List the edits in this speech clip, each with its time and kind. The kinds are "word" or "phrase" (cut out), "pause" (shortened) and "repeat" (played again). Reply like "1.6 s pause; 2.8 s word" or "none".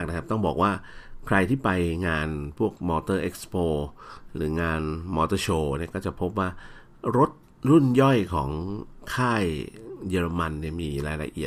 none